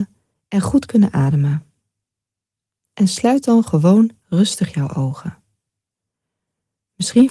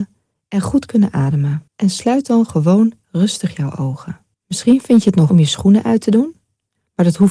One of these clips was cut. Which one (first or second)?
second